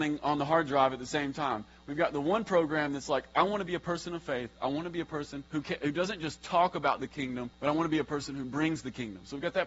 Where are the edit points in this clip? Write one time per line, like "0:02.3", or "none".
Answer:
0:05.5
0:07.5